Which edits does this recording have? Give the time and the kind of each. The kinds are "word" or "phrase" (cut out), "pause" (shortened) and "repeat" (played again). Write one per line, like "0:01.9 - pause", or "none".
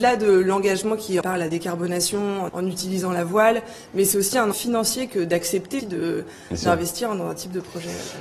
0:01.2 - word
0:02.5 - phrase
0:04.5 - word
0:05.8 - word